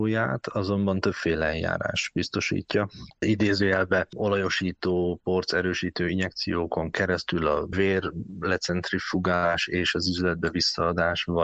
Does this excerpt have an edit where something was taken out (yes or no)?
no